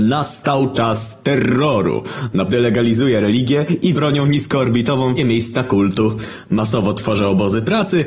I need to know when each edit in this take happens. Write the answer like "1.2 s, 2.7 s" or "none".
2.5 s, 3.9 s, 5.2 s